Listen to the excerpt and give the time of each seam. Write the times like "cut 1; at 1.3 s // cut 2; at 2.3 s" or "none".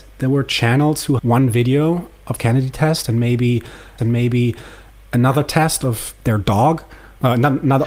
cut 1; at 1.2 s // cut 2; at 2.4 s // cut 3; at 4.0 s